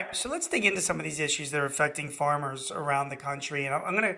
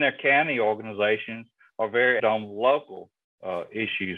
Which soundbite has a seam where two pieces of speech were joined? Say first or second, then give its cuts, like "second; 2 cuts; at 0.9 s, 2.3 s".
second; 1 cut; at 2.2 s